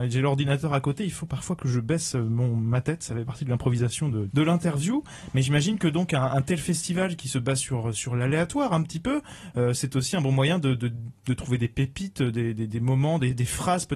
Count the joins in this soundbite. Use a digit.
1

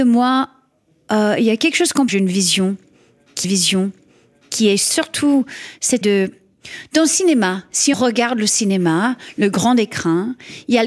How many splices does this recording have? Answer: 4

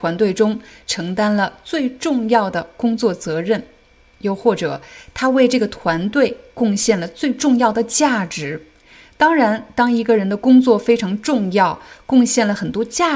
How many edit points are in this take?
0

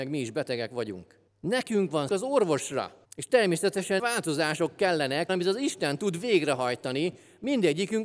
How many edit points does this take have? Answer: 5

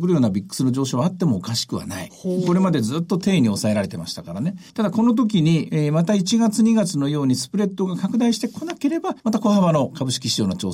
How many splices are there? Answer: 2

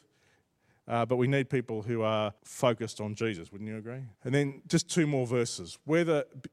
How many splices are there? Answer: 2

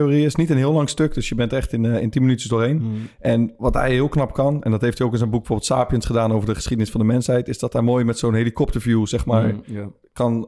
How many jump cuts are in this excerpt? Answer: 0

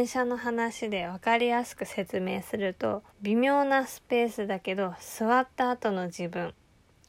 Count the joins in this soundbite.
1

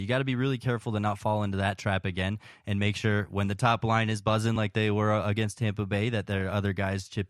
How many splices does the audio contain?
0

